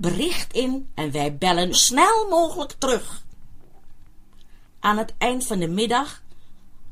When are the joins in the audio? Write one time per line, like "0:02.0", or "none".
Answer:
0:01.7